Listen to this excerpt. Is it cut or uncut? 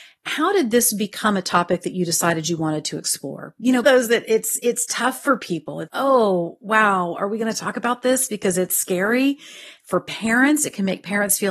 cut